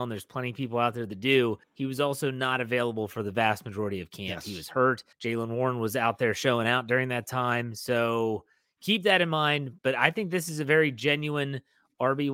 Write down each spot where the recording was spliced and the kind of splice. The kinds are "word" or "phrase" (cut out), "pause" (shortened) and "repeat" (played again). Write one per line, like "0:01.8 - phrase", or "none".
0:01.6 - pause
0:05.1 - pause
0:09.8 - pause